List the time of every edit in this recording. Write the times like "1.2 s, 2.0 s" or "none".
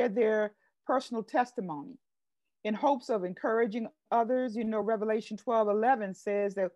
none